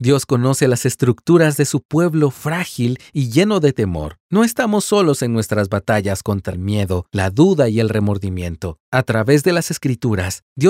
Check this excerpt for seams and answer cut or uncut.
cut